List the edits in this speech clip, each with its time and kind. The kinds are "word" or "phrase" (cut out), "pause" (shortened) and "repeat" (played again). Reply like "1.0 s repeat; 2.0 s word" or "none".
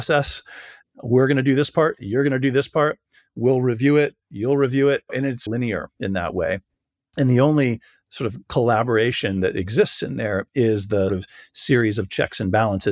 5.5 s word; 11.1 s word